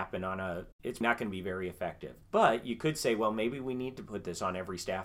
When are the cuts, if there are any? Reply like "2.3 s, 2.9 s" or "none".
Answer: 1.0 s, 2.2 s